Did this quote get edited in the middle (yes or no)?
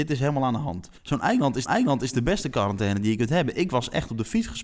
yes